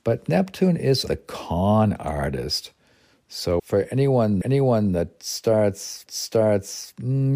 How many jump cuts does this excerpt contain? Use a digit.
4